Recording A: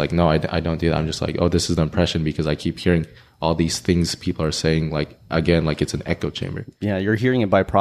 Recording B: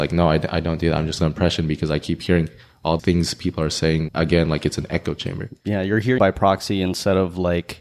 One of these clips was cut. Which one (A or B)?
B